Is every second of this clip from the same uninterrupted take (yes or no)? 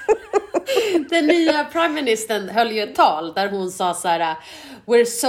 yes